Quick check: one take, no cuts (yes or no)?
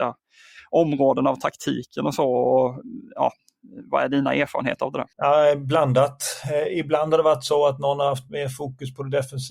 no